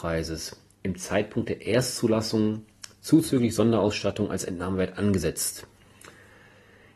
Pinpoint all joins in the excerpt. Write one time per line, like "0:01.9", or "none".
none